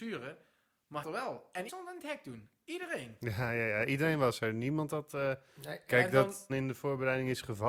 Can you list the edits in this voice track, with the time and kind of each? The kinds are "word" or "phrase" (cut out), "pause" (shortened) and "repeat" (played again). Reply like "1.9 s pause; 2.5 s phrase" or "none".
1.0 s phrase; 1.7 s word; 6.5 s phrase